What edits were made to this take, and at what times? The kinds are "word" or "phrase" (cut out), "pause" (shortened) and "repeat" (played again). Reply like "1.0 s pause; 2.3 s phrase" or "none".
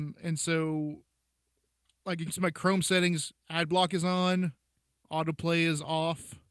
2.3 s word